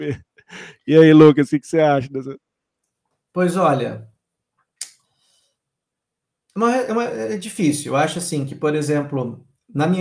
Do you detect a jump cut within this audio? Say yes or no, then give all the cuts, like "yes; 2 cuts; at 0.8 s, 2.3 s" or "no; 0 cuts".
no; 0 cuts